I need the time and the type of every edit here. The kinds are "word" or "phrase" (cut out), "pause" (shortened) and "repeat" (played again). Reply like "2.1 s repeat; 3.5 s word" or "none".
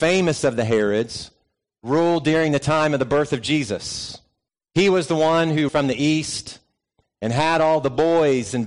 4.5 s pause; 5.7 s phrase